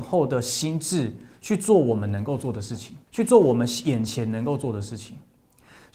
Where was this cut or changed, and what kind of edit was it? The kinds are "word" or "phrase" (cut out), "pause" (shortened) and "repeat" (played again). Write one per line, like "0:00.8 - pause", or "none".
0:03.1 - pause